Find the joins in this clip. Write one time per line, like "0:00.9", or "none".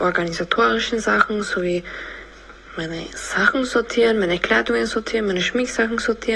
none